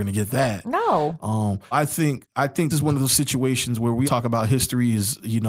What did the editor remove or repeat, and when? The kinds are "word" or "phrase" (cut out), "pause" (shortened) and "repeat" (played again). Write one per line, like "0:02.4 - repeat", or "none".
0:01.7 - word
0:02.7 - word
0:04.0 - word